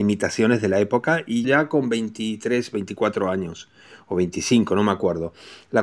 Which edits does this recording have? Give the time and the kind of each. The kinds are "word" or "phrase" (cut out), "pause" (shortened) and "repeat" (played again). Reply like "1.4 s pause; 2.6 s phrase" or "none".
1.4 s word